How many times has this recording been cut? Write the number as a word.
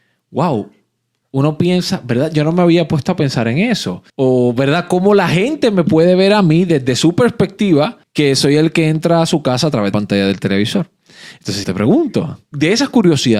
five